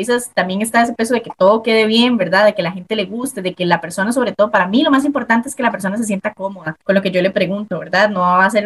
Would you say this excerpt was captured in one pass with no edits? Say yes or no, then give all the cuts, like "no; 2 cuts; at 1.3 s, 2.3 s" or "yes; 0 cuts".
no; 1 cut; at 6.8 s